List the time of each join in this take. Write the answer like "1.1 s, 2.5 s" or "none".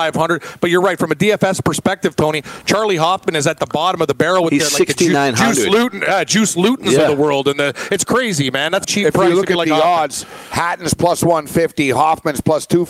8.8 s